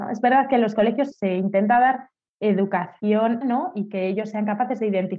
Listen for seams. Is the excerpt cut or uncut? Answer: cut